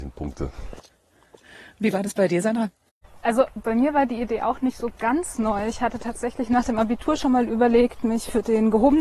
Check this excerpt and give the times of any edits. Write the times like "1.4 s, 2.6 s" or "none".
none